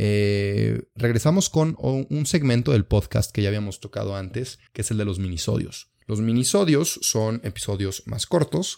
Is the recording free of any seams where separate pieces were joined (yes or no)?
no